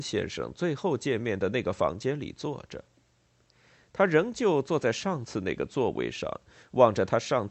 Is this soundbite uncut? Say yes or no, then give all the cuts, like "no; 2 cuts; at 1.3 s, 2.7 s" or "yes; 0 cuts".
yes; 0 cuts